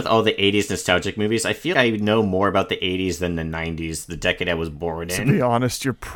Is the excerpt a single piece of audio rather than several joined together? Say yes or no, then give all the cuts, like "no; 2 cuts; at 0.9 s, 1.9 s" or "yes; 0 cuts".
no; 1 cut; at 1.7 s